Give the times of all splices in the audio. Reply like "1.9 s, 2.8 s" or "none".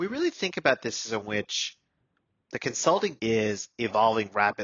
1.2 s, 3.2 s

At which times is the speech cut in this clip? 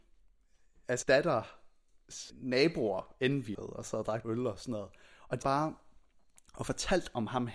1.0 s, 2.3 s, 3.5 s, 4.2 s, 5.4 s

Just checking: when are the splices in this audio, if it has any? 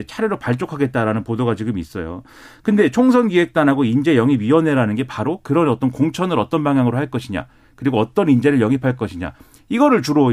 none

